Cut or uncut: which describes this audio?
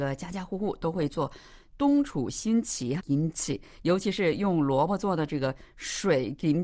cut